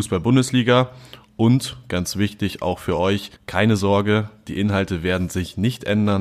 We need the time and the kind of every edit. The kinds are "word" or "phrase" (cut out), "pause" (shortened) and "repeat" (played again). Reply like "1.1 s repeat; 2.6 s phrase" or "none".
3.4 s pause